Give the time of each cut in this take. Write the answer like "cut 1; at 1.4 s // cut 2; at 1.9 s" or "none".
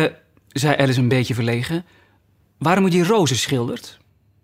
none